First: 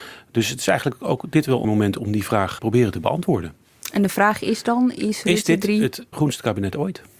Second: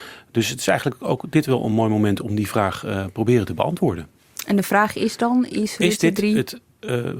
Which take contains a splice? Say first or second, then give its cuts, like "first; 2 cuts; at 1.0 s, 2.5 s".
first; 3 cuts; at 1.6 s, 2.6 s, 6.1 s